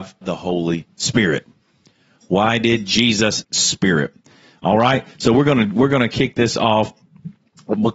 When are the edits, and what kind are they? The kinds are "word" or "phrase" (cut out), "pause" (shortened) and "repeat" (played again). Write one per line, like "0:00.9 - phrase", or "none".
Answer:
0:03.4 - phrase